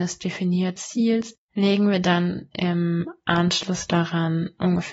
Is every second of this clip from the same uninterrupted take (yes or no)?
no